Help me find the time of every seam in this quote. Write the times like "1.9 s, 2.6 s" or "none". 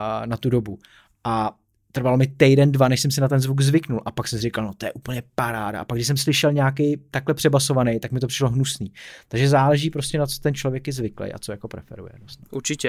none